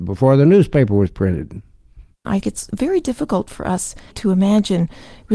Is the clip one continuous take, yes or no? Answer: no